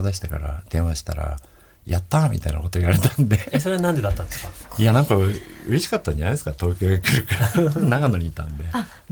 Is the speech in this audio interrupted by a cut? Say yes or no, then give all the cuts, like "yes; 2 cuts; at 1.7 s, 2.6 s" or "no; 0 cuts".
no; 0 cuts